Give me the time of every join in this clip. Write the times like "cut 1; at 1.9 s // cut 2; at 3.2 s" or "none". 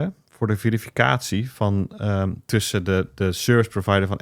none